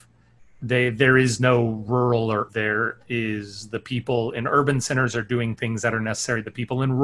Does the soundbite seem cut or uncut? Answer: cut